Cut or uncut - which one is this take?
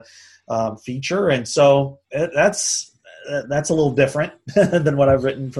cut